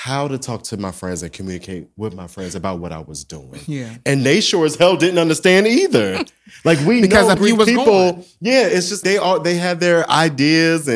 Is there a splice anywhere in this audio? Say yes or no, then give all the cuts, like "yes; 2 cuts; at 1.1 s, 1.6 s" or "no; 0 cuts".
yes; 2 cuts; at 7.4 s, 9.0 s